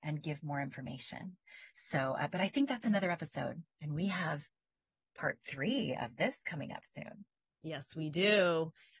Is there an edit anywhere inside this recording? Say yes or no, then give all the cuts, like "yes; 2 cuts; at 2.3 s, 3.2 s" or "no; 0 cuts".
no; 0 cuts